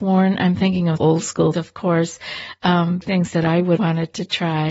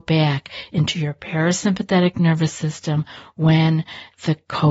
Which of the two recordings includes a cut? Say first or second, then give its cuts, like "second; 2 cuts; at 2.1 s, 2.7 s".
first; 4 cuts; at 1.0 s, 1.5 s, 3.0 s, 3.8 s